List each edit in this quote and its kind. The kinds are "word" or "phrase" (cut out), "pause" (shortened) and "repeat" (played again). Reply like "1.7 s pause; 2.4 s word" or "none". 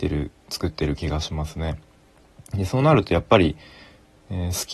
none